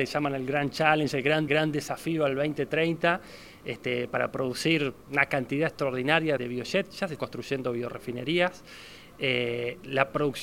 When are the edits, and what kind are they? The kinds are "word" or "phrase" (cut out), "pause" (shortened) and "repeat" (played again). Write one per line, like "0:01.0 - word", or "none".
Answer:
0:01.5 - repeat
0:05.0 - pause
0:06.4 - word
0:07.2 - word